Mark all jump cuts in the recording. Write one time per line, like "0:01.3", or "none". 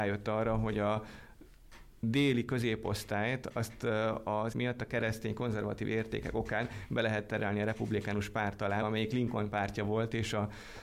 0:04.5
0:08.8